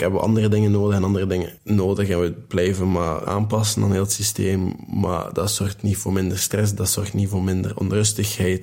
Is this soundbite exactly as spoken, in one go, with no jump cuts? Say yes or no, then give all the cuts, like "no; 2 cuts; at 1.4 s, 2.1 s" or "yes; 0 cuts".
no; 2 cuts; at 1.6 s, 3.3 s